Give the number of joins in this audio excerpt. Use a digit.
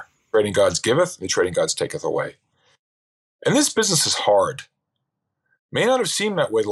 0